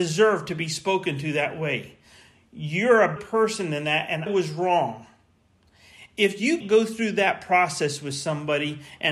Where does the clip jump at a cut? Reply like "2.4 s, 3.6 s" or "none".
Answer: 3.2 s, 4.3 s, 6.6 s